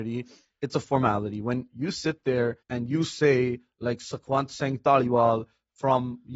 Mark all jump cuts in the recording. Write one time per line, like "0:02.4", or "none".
0:02.6